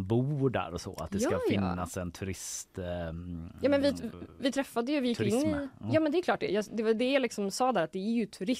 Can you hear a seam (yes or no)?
no